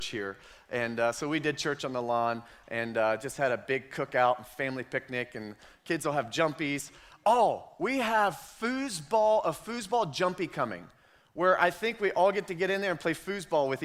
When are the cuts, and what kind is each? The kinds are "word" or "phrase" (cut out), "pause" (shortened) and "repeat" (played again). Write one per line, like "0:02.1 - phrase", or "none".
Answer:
none